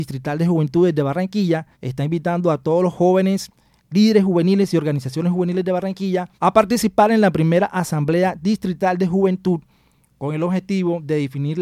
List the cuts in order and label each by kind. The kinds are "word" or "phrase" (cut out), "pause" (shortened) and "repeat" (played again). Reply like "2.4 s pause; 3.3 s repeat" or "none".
1.7 s pause; 6.3 s pause